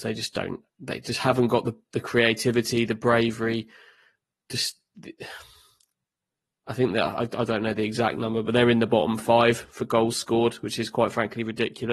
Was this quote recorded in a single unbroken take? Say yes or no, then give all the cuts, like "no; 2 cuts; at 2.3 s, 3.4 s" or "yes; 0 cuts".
yes; 0 cuts